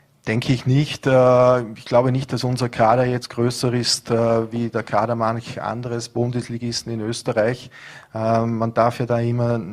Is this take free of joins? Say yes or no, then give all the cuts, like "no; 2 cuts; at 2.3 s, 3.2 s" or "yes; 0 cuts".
yes; 0 cuts